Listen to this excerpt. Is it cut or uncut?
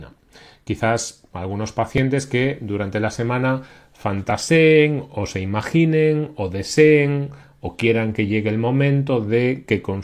uncut